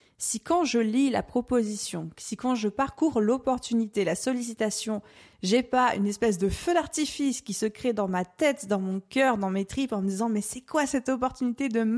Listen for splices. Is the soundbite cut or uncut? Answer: uncut